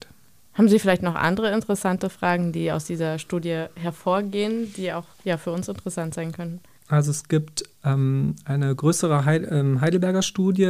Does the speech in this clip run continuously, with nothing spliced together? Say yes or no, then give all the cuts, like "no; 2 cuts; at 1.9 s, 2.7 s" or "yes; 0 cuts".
no; 1 cut; at 5.1 s